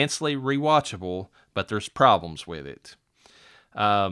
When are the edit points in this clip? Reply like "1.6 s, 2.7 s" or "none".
none